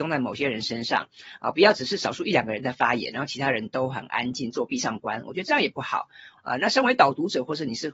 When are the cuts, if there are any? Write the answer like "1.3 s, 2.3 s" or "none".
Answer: 6.4 s